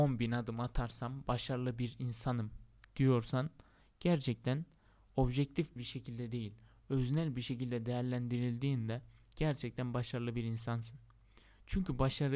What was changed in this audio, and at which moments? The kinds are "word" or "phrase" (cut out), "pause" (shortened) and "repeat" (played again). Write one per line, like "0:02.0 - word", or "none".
0:05.8 - phrase